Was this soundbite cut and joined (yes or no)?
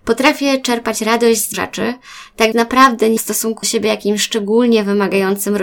yes